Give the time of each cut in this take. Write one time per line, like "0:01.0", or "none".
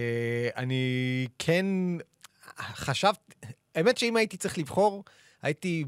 none